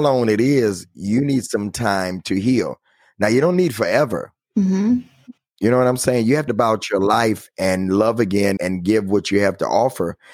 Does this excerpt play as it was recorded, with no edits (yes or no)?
no